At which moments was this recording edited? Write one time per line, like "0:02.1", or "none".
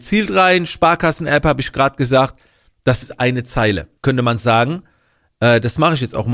0:03.0
0:04.0

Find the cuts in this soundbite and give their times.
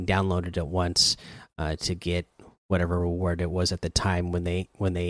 none

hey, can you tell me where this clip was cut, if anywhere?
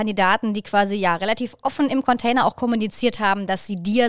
none

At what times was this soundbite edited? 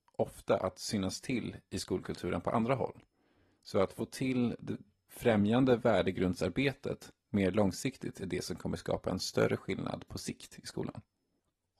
none

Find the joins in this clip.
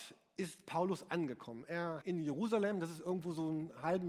0:02.0

